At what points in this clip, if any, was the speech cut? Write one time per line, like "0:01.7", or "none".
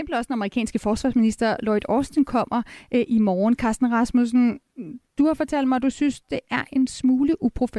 none